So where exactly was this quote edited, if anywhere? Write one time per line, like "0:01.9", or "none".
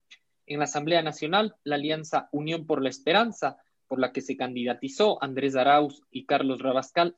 none